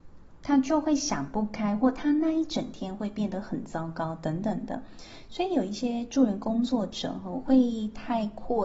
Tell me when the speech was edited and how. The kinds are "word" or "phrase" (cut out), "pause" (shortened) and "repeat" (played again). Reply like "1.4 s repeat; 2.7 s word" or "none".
none